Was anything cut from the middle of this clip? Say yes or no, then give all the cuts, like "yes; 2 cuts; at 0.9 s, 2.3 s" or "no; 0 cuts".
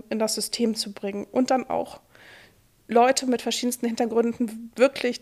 no; 0 cuts